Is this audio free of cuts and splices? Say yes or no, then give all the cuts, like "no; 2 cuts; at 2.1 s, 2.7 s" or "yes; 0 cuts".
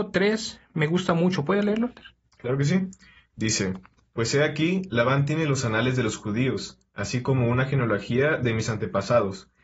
yes; 0 cuts